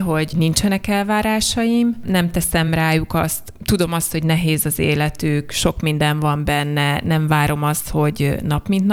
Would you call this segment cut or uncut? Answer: uncut